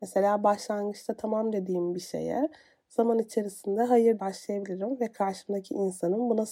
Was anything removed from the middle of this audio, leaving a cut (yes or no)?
yes